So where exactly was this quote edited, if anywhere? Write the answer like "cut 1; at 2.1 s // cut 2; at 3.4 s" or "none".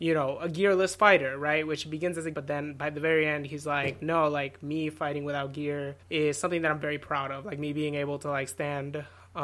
cut 1; at 2.3 s // cut 2; at 6.0 s